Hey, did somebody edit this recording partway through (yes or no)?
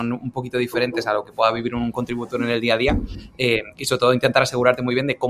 no